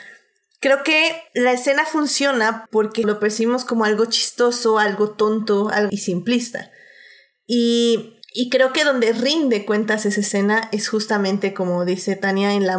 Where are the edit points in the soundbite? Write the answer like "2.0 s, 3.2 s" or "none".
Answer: 1.3 s, 2.7 s, 3.0 s, 5.9 s, 8.2 s